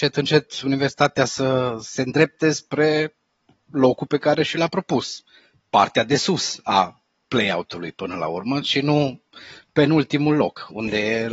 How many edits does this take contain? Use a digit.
0